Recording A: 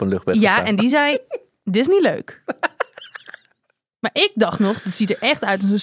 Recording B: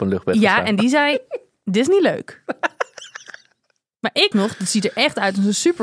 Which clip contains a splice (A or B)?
B